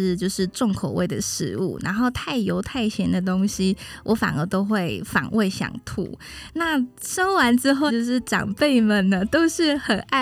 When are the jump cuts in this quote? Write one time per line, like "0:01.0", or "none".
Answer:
0:07.9